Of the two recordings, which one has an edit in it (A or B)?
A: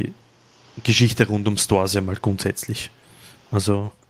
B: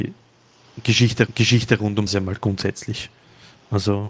B